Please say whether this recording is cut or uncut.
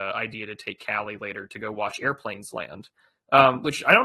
uncut